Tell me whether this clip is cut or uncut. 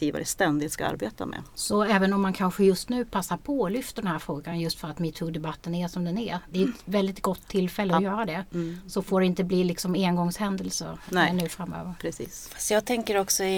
uncut